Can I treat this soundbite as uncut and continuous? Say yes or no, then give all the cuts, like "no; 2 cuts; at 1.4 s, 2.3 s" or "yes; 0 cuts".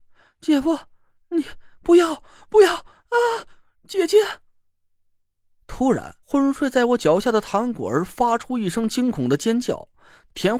no; 1 cut; at 6.2 s